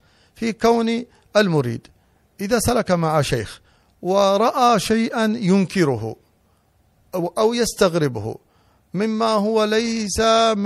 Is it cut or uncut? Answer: uncut